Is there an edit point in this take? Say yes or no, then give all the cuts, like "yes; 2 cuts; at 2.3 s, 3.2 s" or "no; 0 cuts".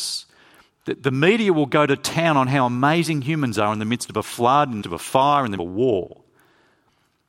yes; 2 cuts; at 4.8 s, 5.6 s